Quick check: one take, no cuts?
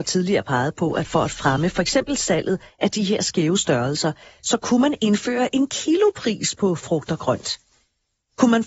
yes; 0 cuts

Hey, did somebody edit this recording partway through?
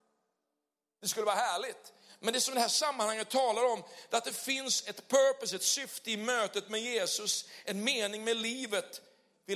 no; 0 cuts

